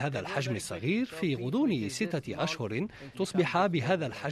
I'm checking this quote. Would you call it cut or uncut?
cut